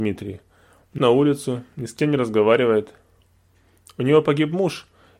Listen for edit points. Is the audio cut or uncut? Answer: cut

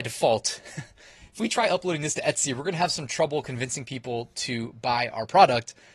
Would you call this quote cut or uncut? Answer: uncut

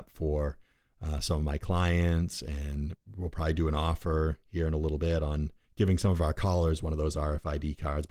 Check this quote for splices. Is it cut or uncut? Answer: cut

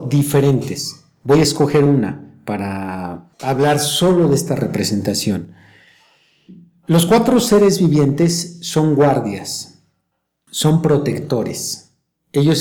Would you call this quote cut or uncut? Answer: uncut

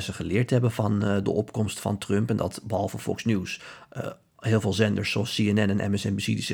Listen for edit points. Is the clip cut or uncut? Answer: uncut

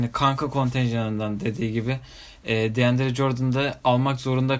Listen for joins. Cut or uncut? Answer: uncut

